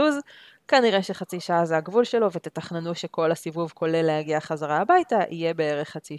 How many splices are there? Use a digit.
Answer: 0